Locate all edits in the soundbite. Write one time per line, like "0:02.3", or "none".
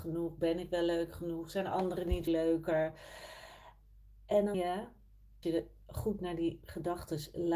0:02.3
0:04.5
0:05.4